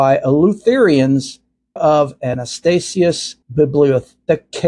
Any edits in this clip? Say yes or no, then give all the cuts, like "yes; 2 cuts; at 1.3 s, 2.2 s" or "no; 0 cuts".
yes; 2 cuts; at 1.8 s, 3.4 s